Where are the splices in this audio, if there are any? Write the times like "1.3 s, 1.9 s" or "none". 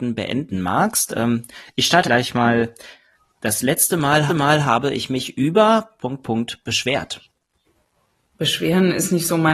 2.0 s, 4.3 s, 6.2 s, 7.6 s